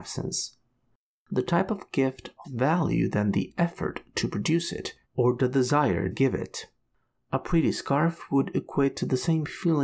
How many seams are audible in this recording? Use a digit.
3